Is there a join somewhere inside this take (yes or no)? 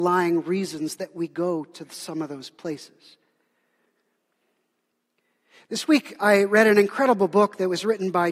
no